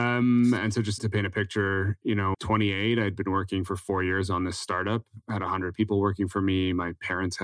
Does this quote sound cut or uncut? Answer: cut